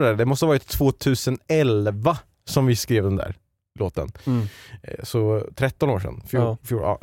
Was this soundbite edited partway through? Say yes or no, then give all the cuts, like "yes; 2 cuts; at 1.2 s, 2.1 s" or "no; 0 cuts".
no; 0 cuts